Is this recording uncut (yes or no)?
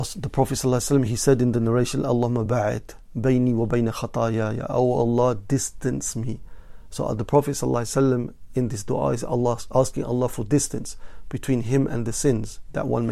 yes